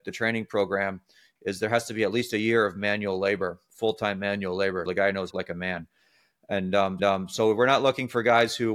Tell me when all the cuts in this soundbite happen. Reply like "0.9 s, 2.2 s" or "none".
4.9 s, 5.3 s, 7.0 s